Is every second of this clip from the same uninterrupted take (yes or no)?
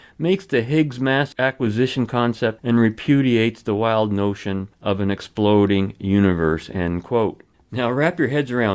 no